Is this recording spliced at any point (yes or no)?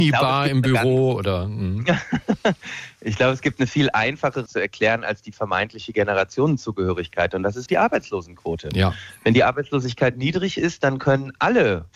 yes